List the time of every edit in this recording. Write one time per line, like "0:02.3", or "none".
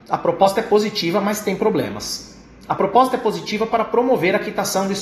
none